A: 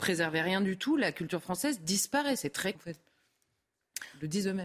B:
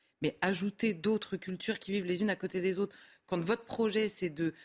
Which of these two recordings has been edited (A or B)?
A